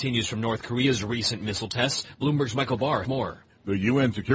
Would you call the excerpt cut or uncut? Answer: cut